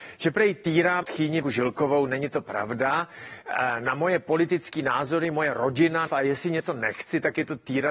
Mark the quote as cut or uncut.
cut